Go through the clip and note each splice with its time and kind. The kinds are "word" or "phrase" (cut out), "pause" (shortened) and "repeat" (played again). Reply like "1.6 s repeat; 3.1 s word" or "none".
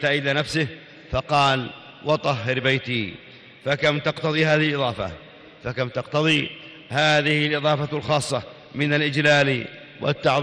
none